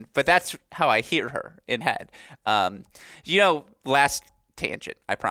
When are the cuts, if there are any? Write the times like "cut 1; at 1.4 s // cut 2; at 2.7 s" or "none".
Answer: cut 1; at 1.8 s